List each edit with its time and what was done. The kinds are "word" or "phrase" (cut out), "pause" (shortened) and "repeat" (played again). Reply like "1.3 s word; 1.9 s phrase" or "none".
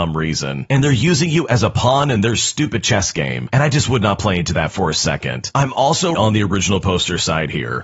6.1 s word

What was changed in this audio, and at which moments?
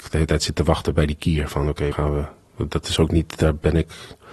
1.9 s word

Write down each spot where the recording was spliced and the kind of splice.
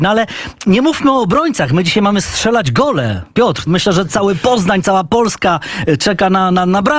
3.7 s word

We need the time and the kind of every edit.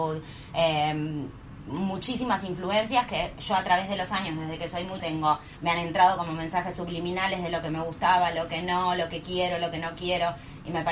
5.0 s word

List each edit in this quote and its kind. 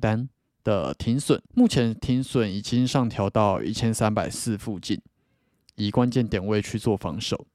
1.5 s pause

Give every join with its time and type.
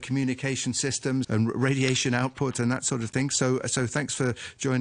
1.2 s word

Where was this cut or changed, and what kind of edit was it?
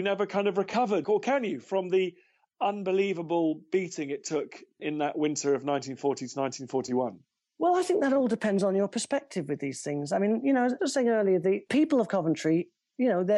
1.0 s word

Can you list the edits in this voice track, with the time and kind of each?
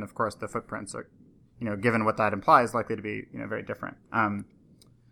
none

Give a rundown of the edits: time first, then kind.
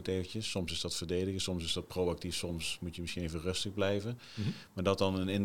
none

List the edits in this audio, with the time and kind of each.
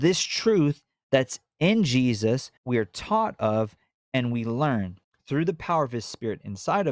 2.6 s pause; 5.0 s pause

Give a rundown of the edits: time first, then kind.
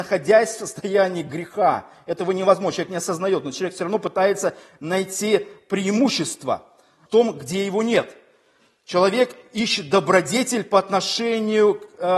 7.1 s word

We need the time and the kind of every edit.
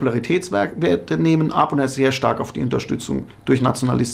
none

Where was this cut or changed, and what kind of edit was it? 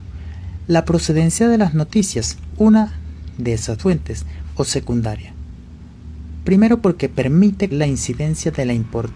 2.5 s word; 3.8 s word; 4.5 s word; 7.7 s word

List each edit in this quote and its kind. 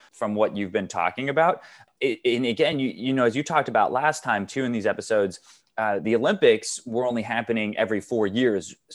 none

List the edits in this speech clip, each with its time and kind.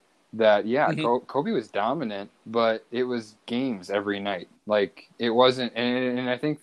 2.4 s pause; 5.1 s pause

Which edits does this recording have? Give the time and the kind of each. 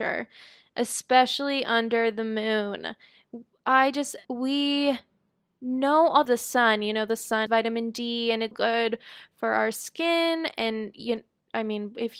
4.2 s pause; 6.3 s phrase; 7.5 s word; 8.5 s word

